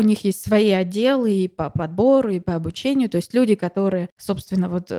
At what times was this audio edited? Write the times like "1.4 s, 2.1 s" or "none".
none